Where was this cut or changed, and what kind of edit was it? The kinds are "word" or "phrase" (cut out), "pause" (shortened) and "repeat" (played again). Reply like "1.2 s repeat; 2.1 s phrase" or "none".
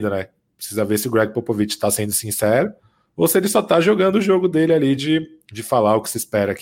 none